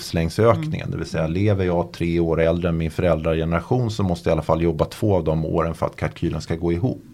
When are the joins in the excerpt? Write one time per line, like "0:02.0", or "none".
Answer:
none